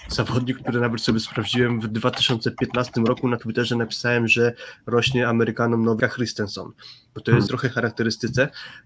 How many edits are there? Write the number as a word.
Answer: two